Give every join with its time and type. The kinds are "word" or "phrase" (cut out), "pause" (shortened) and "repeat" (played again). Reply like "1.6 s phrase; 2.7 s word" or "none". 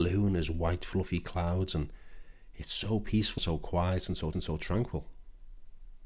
3.4 s word; 4.3 s repeat